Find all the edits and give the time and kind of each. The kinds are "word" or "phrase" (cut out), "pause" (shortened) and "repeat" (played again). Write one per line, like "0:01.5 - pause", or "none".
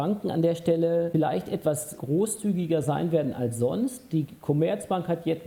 none